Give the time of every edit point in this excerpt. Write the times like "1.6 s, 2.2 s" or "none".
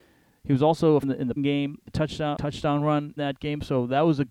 1.0 s, 1.4 s, 1.9 s, 2.4 s, 3.2 s